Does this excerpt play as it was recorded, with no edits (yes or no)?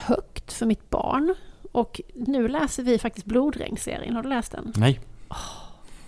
yes